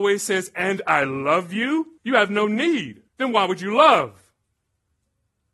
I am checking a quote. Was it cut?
yes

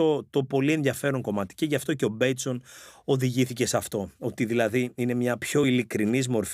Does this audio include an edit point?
no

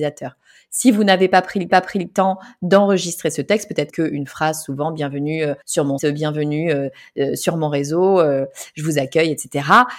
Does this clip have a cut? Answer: yes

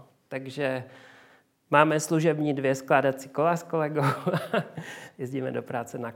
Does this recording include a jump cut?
no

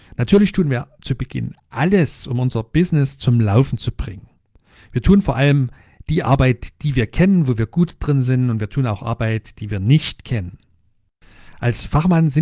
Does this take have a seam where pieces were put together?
no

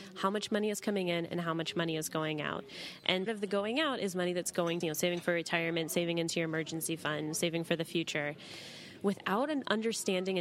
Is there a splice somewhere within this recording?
yes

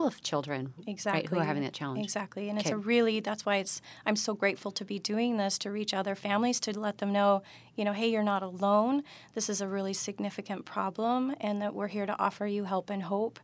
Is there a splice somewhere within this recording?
no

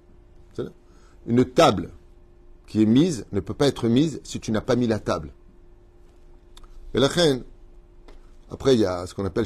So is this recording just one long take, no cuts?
no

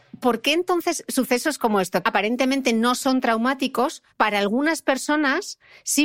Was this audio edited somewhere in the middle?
yes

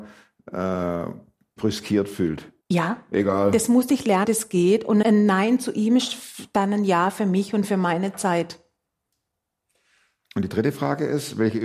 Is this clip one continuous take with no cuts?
no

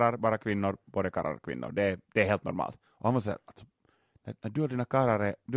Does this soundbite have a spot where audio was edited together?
yes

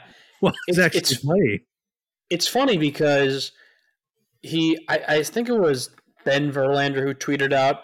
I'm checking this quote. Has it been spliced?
no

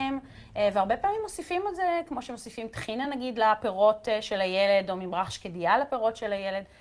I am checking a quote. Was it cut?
no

